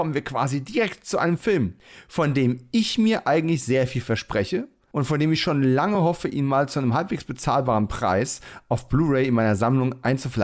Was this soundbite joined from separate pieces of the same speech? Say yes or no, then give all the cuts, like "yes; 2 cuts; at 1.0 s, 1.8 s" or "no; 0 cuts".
no; 0 cuts